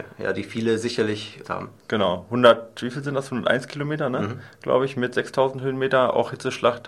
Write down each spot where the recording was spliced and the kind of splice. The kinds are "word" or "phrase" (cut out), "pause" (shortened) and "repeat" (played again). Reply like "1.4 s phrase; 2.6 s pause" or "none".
1.4 s word

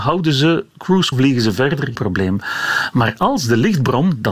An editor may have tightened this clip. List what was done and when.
1.1 s word; 1.9 s word

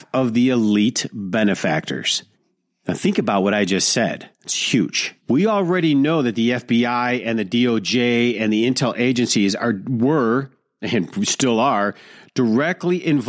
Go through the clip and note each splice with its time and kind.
2.3 s pause; 4.3 s pause; 5.2 s pause

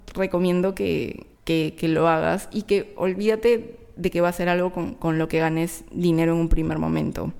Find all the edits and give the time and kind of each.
1.3 s pause

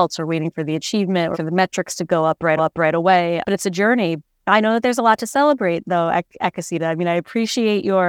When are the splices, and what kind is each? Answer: 1.3 s word; 2.6 s repeat

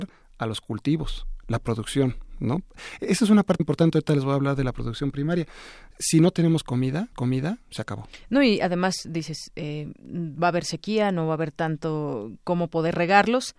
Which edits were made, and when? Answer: 3.6 s word; 7.1 s repeat

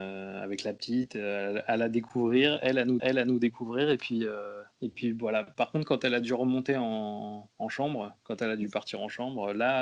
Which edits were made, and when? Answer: 3.0 s repeat

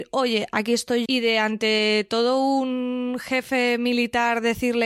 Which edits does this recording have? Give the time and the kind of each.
1.1 s word

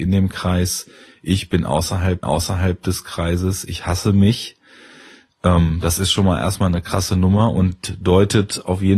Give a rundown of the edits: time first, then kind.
2.2 s repeat

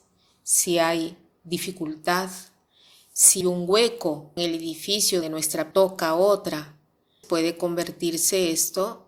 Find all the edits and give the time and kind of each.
3.4 s word; 4.4 s word; 5.2 s word; 5.7 s word; 7.2 s word

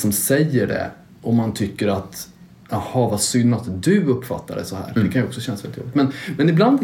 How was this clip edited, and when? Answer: none

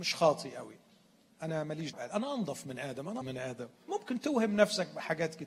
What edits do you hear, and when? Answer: 1.9 s word; 3.2 s word; 3.9 s word

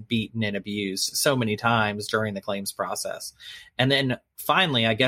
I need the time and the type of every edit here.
none

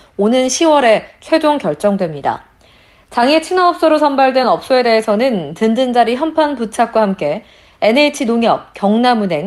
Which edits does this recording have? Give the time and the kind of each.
none

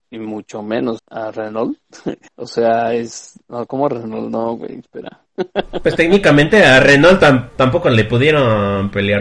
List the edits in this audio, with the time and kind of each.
1.0 s word; 2.3 s pause; 3.7 s word; 5.3 s pause

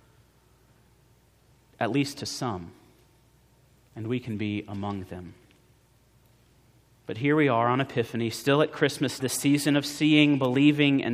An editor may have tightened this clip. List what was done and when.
9.2 s word

